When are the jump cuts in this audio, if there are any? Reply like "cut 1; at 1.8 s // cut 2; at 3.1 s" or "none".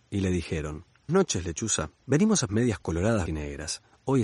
cut 1; at 1.1 s // cut 2; at 2.0 s // cut 3; at 2.5 s // cut 4; at 3.3 s